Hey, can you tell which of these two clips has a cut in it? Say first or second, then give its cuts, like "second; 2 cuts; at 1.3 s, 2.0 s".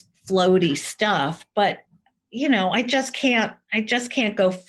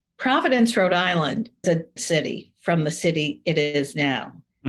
second; 2 cuts; at 1.6 s, 2.0 s